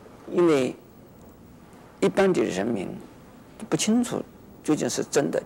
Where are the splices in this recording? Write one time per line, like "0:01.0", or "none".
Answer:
none